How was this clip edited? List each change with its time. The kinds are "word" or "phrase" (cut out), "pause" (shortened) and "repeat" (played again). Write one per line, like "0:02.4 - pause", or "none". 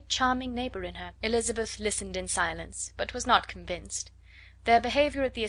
0:01.2 - pause